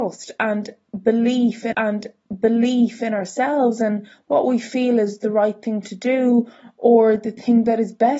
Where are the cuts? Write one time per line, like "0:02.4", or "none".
0:01.7